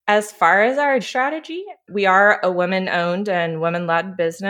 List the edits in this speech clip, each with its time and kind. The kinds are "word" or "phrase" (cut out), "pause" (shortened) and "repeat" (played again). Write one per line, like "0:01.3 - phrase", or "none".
0:01.0 - word

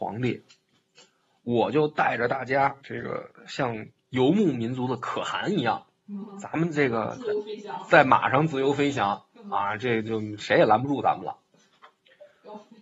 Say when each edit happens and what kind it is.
0:02.8 - pause

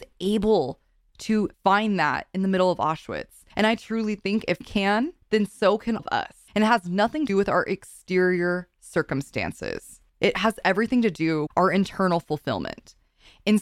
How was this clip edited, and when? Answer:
0:01.5 - pause
0:03.5 - pause
0:04.6 - word
0:05.2 - pause
0:06.0 - word
0:06.5 - pause
0:07.3 - word
0:10.1 - pause
0:11.5 - phrase

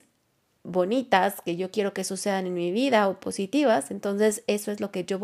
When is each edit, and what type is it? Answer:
none

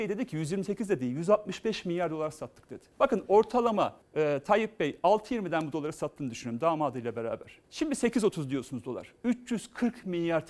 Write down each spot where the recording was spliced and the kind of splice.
0:02.9 - pause
0:04.0 - pause
0:07.6 - pause

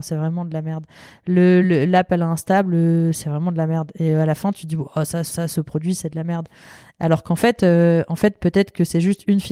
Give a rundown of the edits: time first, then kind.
0:01.6 - word
0:05.3 - repeat

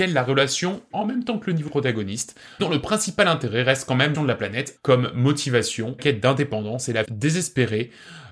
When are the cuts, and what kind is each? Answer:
0:00.9 - word
0:01.7 - word
0:02.6 - word
0:04.1 - word
0:04.8 - word
0:06.0 - word
0:07.0 - word

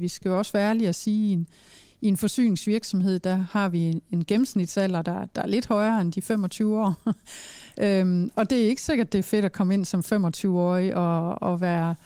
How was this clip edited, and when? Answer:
none

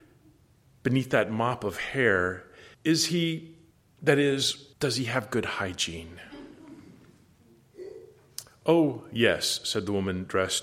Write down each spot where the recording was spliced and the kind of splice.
0:02.7 - pause
0:03.7 - pause
0:04.7 - pause

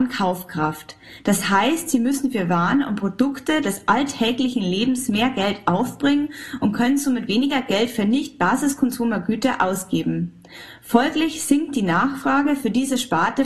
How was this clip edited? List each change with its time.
none

